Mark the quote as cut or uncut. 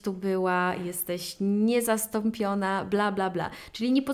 uncut